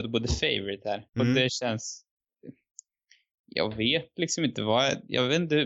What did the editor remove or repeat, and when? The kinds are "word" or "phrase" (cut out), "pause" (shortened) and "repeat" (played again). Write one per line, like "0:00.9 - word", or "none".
0:01.1 - pause